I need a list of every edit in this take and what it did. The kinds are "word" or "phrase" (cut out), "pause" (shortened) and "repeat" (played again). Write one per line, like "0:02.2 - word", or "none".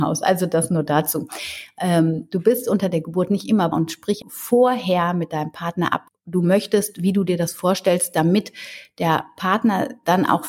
0:03.7 - word
0:04.2 - word
0:06.1 - word